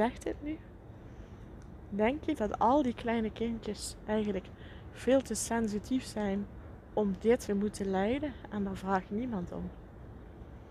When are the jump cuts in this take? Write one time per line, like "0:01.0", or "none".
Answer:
0:02.3
0:07.5